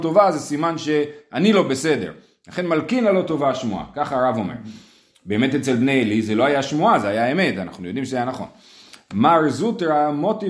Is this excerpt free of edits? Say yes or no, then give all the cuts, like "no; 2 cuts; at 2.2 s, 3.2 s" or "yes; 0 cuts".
yes; 0 cuts